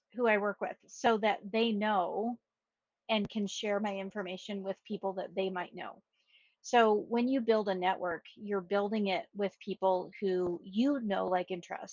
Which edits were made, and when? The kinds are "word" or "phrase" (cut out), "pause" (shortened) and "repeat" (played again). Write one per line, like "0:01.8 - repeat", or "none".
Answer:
none